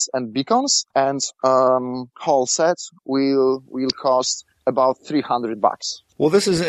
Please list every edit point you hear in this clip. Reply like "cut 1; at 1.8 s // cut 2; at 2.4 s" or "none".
cut 1; at 0.9 s